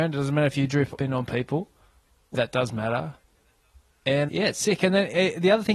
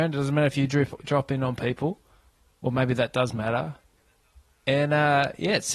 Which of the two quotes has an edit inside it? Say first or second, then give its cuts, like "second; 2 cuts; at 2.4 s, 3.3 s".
first; 3 cuts; at 1.0 s, 2.3 s, 4.3 s